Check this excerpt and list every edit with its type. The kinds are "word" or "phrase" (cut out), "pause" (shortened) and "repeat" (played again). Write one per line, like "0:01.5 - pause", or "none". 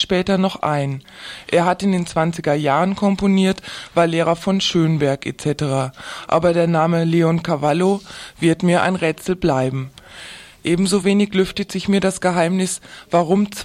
none